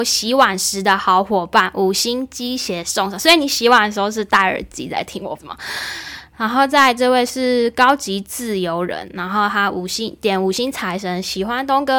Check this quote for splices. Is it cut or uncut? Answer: cut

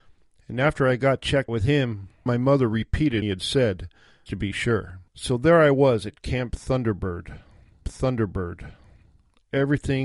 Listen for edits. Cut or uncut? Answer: cut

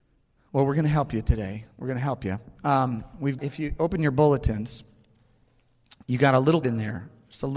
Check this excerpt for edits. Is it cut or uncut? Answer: cut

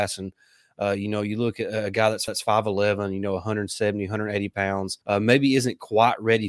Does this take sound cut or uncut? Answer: cut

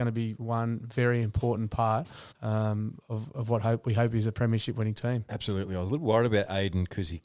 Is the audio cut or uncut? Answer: cut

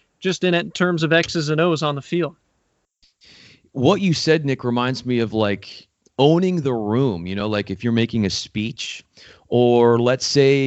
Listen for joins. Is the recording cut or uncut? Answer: uncut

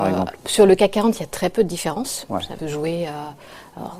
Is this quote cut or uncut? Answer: cut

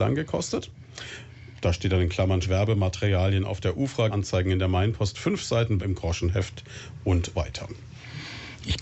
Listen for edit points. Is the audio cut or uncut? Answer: cut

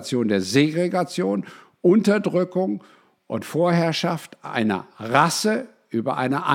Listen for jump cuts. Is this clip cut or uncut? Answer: uncut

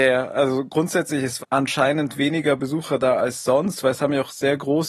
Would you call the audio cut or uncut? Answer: cut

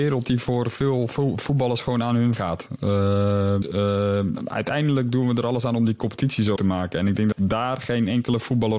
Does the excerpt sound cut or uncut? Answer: cut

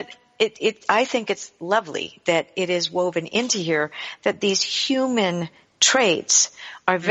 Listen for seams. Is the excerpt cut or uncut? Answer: uncut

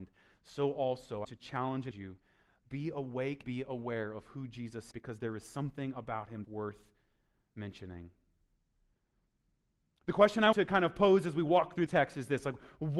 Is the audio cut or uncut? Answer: cut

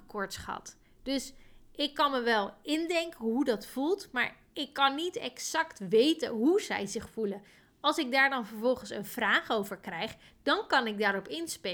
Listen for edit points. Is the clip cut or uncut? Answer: uncut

